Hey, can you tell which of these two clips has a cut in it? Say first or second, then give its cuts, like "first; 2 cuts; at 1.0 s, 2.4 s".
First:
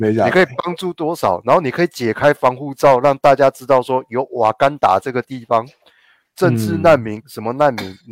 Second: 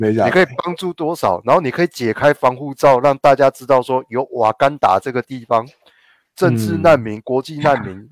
first; 1 cut; at 7.2 s